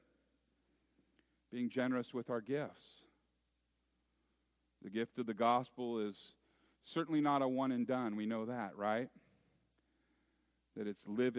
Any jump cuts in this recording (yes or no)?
no